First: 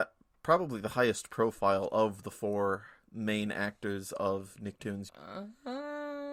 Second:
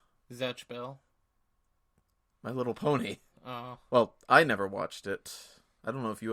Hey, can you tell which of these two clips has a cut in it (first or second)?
first